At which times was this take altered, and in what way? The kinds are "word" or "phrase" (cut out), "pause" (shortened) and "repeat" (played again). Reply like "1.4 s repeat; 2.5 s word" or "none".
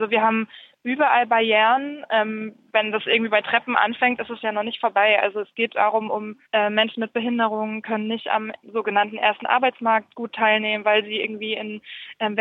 6.4 s pause; 8.6 s pause